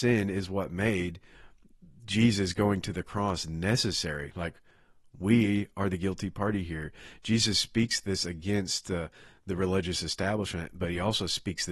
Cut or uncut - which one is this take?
uncut